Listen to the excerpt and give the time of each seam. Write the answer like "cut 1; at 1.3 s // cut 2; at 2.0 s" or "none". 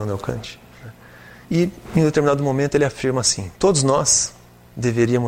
cut 1; at 1.4 s // cut 2; at 3.5 s